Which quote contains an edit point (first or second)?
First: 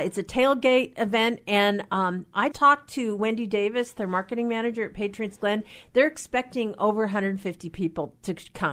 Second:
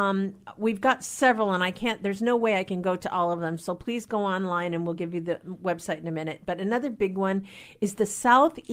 first